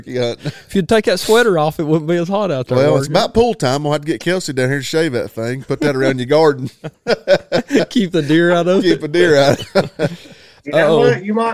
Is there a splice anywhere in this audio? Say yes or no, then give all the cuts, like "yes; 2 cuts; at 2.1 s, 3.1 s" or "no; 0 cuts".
no; 0 cuts